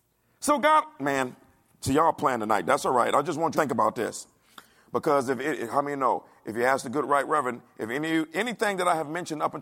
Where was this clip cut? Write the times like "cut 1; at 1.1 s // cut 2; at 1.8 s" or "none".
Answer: cut 1; at 3.5 s